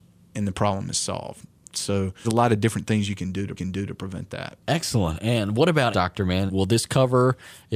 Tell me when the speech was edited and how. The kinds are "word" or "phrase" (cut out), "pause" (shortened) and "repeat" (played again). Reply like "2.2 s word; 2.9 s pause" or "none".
2.2 s word; 3.6 s repeat; 4.6 s pause; 5.9 s word; 6.5 s word